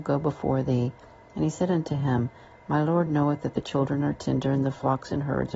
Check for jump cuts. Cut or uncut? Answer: uncut